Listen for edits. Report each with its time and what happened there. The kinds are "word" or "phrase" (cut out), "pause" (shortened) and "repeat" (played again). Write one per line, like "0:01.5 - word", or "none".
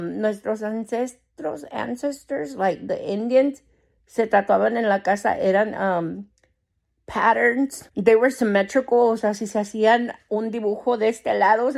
none